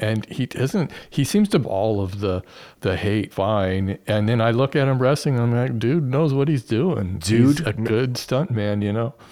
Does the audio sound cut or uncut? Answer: cut